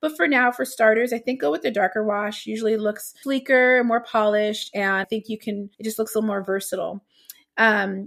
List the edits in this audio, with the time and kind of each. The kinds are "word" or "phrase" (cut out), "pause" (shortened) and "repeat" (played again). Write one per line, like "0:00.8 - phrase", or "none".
0:03.2 - word
0:05.0 - word
0:05.7 - pause

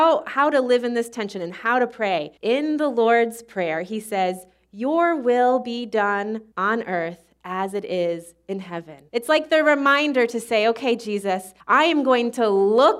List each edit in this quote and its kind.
0:02.4 - pause
0:06.5 - pause
0:09.1 - pause
0:11.6 - pause

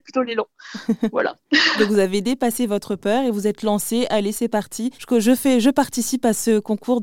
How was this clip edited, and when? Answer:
0:04.9 - pause

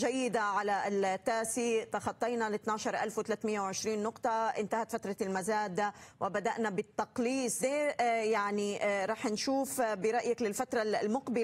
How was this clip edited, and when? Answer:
0:07.6 - phrase

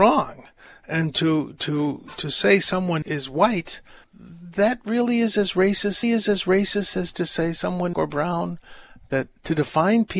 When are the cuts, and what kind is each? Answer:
0:03.0 - word
0:04.0 - word
0:06.0 - repeat
0:07.9 - phrase

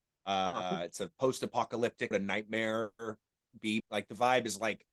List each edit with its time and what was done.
0:02.1 - word
0:03.8 - word

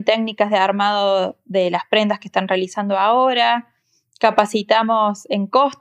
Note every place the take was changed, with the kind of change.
none

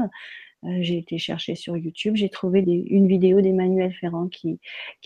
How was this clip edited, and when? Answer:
0:02.6 - word

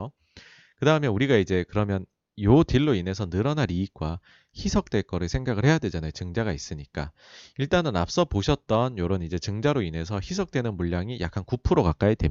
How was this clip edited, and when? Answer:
none

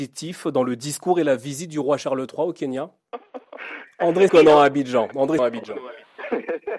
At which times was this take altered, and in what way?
0:04.3 - word
0:05.4 - word

